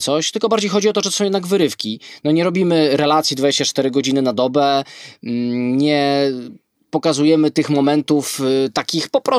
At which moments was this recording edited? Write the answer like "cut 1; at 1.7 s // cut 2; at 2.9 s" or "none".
none